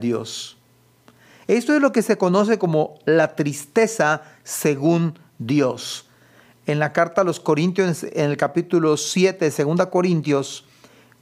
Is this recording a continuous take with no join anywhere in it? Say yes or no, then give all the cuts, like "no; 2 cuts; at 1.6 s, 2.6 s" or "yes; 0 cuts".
yes; 0 cuts